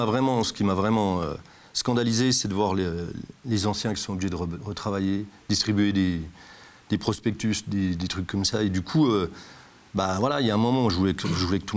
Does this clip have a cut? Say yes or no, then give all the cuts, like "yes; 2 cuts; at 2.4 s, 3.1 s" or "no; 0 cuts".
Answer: no; 0 cuts